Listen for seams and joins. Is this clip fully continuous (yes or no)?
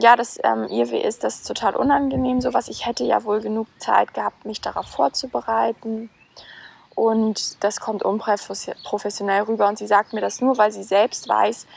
yes